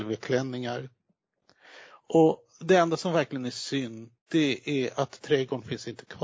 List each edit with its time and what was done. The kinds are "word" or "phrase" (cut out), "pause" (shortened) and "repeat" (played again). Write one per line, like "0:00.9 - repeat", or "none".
0:04.2 - pause